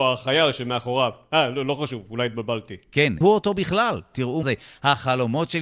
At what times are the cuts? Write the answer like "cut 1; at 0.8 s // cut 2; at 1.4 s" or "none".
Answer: cut 1; at 3.2 s // cut 2; at 4.4 s